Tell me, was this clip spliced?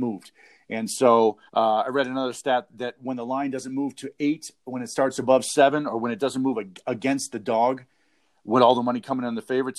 yes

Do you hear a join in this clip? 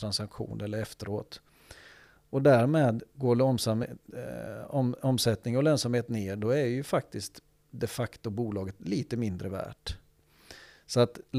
no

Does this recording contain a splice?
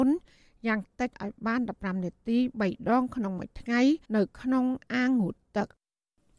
yes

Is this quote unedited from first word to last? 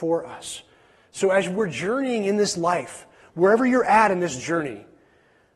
yes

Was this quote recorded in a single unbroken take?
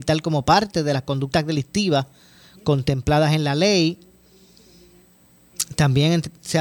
yes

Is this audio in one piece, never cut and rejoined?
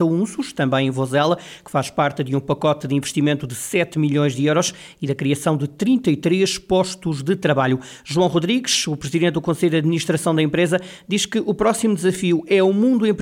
yes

